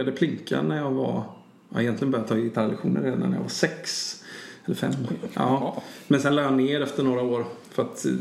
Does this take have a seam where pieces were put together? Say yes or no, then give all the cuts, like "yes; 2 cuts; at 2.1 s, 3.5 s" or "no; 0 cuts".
no; 0 cuts